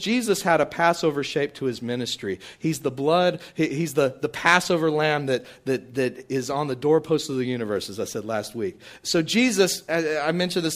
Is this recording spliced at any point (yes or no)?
no